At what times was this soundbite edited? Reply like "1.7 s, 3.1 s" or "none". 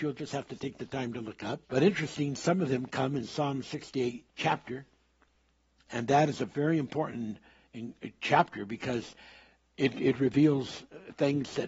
1.6 s, 4.3 s